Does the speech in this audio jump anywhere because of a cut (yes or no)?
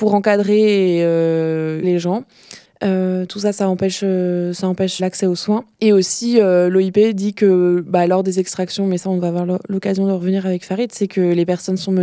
yes